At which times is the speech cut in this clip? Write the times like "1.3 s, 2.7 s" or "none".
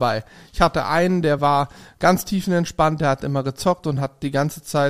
none